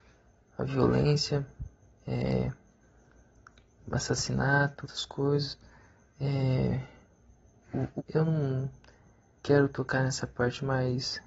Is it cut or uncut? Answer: cut